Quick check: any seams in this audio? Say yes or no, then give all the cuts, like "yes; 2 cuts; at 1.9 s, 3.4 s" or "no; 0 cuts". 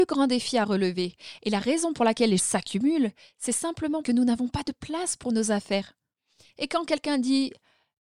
yes; 2 cuts; at 2.4 s, 4.0 s